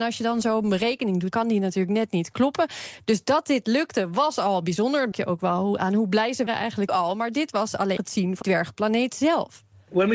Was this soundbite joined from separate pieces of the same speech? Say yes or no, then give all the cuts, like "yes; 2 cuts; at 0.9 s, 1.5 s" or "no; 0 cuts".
yes; 6 cuts; at 1.3 s, 5.1 s, 6.5 s, 6.9 s, 8.0 s, 8.4 s